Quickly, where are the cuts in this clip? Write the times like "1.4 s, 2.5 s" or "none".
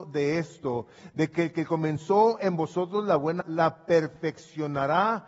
3.4 s